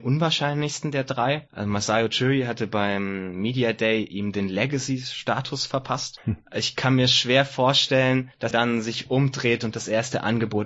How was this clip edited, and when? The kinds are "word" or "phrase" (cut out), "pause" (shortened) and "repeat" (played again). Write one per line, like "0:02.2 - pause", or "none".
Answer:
0:08.5 - word